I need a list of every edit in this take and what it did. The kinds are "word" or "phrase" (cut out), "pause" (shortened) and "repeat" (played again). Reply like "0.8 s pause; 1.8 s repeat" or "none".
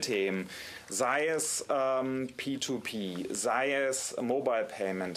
none